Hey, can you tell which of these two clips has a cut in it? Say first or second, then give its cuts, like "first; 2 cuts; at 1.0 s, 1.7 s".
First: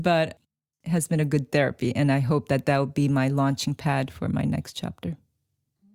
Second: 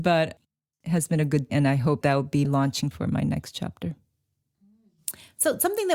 second; 4 cuts; at 1.5 s, 2.0 s, 2.4 s, 2.9 s